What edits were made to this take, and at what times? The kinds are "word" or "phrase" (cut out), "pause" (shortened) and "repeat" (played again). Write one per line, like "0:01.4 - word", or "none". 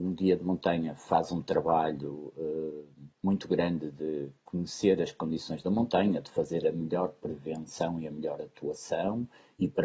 0:03.2 - pause

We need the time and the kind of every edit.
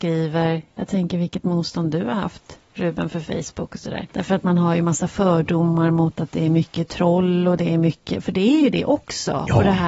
0:04.1 - pause

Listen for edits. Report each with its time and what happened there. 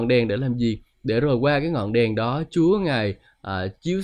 none

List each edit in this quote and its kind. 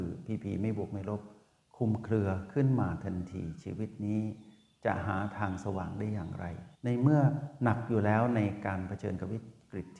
0:06.7 - pause

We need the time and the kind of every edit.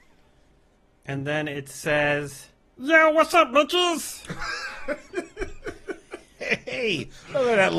0:02.6 - pause

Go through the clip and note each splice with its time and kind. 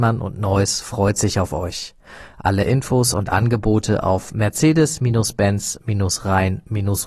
none

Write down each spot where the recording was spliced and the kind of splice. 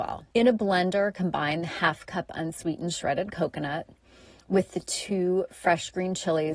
none

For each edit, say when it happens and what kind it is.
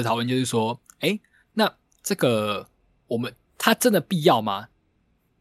none

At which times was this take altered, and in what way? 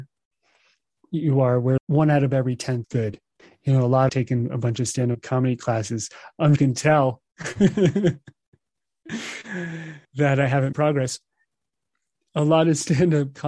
0:01.8 - word
0:02.8 - phrase
0:03.4 - pause
0:04.1 - phrase
0:06.6 - phrase
0:10.0 - pause
0:10.7 - word

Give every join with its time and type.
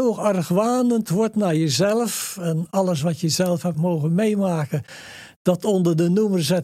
none

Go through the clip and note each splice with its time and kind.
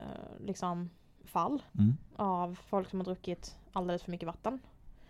0:01.7 - pause
0:02.7 - pause

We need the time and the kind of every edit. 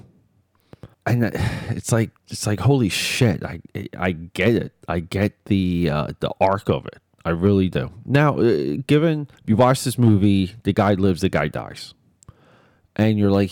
0:00.9 - pause
0:02.2 - pause
0:07.2 - pause
0:09.4 - pause

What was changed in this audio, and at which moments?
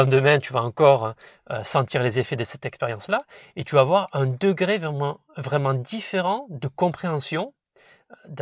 none

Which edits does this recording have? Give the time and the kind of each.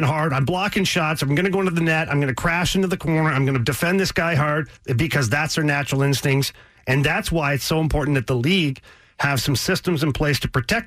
0:04.8 - pause

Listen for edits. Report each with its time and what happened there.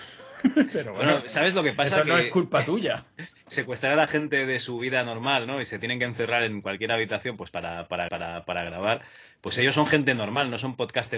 0:08.1 - repeat

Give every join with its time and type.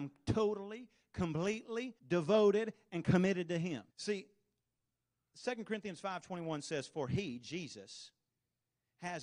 0:02.0 - pause
0:03.9 - pause

